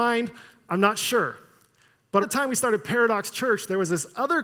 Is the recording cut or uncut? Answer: cut